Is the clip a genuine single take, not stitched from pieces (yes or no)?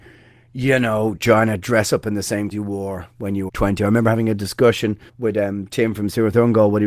no